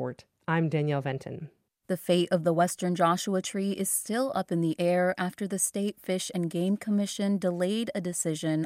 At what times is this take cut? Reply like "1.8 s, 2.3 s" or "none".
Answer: none